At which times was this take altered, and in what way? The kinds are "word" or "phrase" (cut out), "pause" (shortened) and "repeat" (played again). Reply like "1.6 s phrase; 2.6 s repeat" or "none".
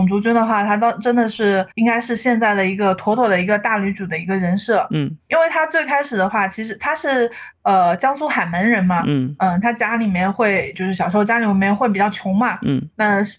1.7 s pause; 5.2 s word